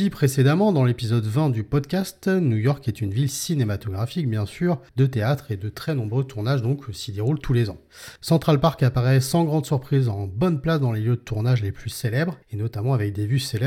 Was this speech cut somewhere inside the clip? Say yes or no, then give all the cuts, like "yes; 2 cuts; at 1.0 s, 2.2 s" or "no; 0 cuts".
yes; 3 cuts; at 4.9 s, 8.2 s, 12.4 s